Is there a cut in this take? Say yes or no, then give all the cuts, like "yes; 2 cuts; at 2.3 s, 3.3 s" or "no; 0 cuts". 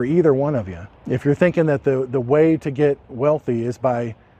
yes; 1 cut; at 1.0 s